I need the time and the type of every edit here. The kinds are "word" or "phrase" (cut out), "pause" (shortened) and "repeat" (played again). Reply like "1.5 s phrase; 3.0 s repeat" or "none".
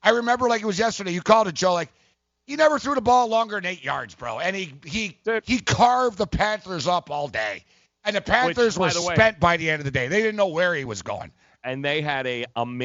none